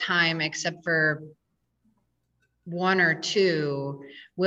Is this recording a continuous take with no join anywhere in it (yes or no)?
yes